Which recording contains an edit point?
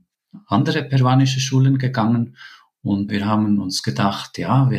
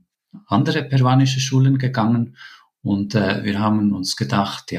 first; 1 cut; at 3.1 s

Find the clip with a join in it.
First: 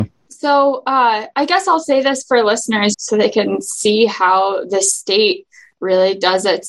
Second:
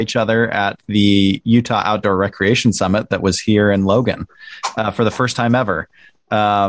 first; 1 cut; at 2.9 s

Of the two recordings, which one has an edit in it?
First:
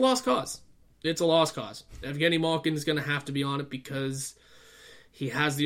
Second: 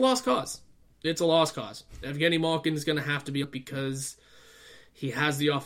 second; 1 cut; at 3.4 s

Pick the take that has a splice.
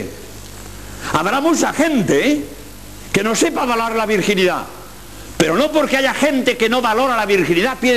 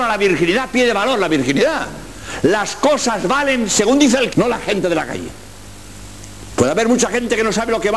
second; 1 cut; at 4.3 s

